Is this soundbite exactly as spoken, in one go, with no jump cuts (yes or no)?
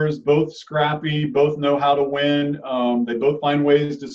yes